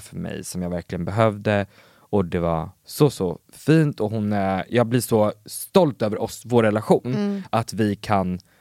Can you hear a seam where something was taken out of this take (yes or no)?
no